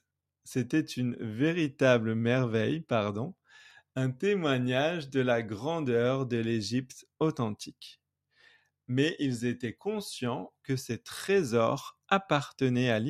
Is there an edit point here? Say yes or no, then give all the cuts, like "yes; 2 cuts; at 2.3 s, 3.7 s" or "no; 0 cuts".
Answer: no; 0 cuts